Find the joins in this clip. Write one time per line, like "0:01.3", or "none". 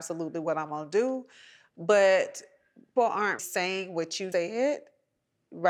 0:03.0
0:03.4
0:04.3